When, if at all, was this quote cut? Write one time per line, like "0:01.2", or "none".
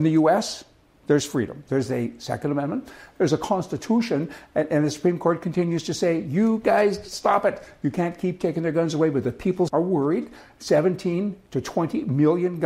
0:09.7